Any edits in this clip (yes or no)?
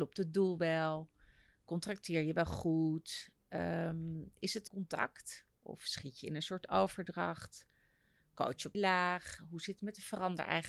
yes